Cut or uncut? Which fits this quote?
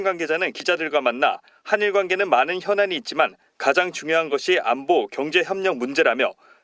uncut